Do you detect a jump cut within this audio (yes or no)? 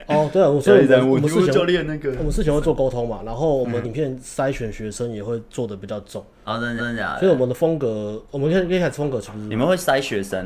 yes